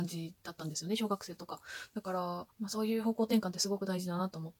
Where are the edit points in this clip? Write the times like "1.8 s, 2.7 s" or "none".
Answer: 2.5 s